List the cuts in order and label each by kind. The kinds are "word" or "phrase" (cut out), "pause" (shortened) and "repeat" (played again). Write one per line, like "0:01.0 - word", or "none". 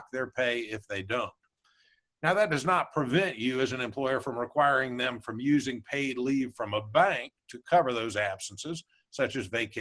none